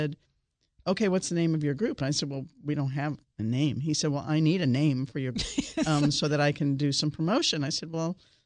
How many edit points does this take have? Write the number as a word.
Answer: one